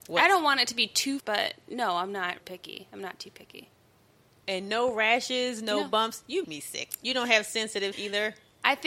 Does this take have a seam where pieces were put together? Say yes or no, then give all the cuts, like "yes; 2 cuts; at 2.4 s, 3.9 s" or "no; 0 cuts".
yes; 4 cuts; at 1.2 s, 2.4 s, 6.4 s, 7.9 s